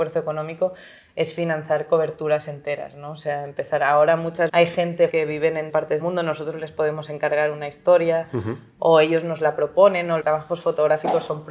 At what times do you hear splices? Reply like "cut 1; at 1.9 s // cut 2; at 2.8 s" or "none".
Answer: cut 1; at 4.5 s // cut 2; at 5.1 s // cut 3; at 5.7 s // cut 4; at 6.0 s // cut 5; at 10.2 s